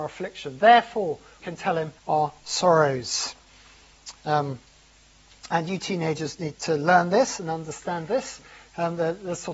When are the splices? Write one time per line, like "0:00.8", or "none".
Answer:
0:01.4
0:02.0
0:06.5